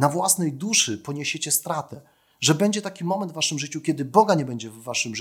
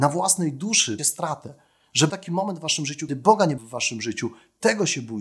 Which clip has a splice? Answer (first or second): second